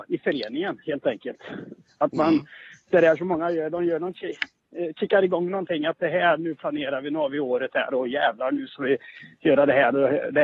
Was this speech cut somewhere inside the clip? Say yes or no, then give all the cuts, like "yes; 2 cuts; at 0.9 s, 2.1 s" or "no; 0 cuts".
no; 0 cuts